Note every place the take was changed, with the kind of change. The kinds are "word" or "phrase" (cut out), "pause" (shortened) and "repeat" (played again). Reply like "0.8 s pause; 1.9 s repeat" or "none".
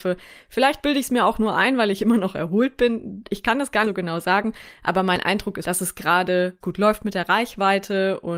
3.8 s word; 5.6 s word; 6.6 s word